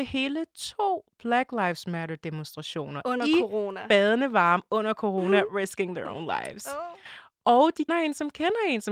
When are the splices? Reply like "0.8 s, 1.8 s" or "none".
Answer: 7.9 s